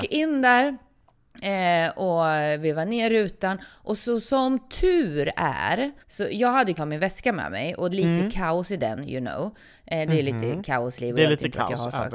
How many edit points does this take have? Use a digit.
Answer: 4